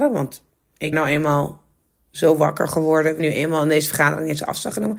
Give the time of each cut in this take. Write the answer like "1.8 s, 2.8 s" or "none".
0.9 s, 3.2 s